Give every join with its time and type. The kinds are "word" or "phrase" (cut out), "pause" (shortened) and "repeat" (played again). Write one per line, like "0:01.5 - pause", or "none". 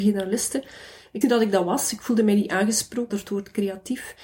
0:01.2 - word
0:03.1 - word